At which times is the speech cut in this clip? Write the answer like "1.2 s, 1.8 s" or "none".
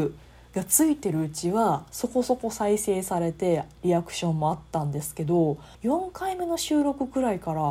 5.7 s